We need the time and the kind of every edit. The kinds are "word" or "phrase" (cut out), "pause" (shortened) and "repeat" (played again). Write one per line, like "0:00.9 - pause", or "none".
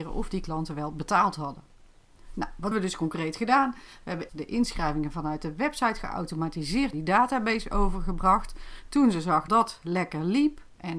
0:02.7 - word
0:04.3 - word
0:06.9 - word
0:09.5 - word

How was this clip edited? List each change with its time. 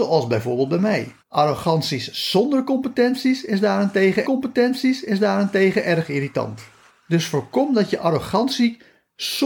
0:01.2 - pause
0:04.2 - repeat
0:06.9 - pause

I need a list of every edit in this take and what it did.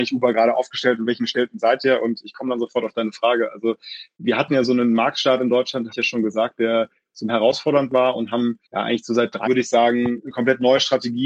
0:04.2 - word
0:05.9 - word
0:07.3 - word
0:08.7 - pause
0:09.5 - word
0:10.2 - word

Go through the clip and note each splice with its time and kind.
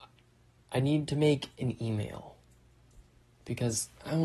none

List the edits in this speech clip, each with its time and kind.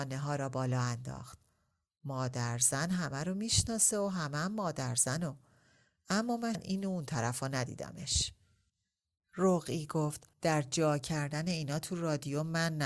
0:06.5 - word
0:10.3 - pause

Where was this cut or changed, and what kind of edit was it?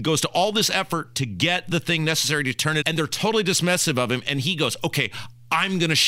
0:02.8 - word

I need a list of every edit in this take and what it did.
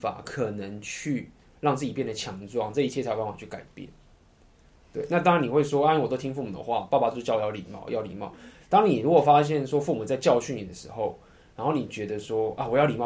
none

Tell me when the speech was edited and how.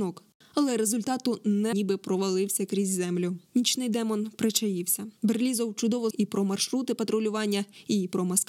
0:01.7 - phrase
0:03.4 - pause
0:05.2 - pause
0:06.1 - word

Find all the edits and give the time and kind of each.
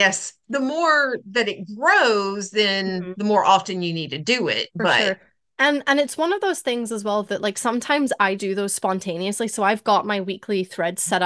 0:07.2 - word
0:08.4 - word

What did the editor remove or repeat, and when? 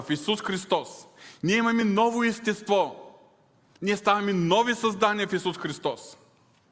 none

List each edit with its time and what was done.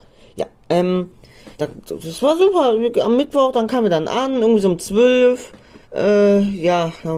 0:01.5 - pause
0:05.8 - pause

